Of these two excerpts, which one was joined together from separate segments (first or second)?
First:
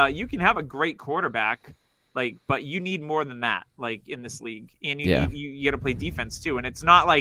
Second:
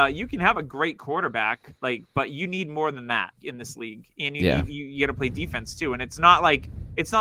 second